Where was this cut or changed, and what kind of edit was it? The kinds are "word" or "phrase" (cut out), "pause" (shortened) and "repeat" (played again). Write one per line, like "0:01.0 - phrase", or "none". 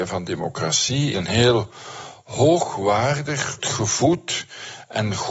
0:01.1 - word
0:03.6 - word